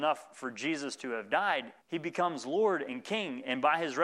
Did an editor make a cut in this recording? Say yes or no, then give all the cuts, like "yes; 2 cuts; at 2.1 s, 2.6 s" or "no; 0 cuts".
yes; 1 cut; at 1.8 s